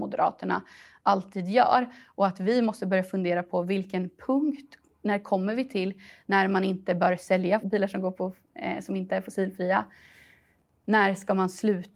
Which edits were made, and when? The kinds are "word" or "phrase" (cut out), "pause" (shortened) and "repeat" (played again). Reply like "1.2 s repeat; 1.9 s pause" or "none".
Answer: none